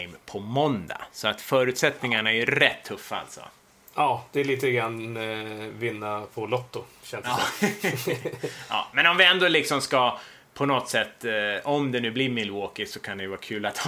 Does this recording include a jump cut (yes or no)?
no